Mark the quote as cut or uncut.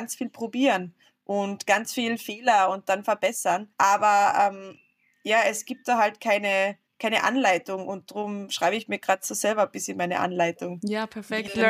cut